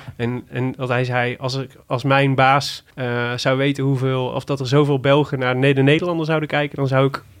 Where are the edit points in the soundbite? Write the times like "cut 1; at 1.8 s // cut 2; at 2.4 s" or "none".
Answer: cut 1; at 2.9 s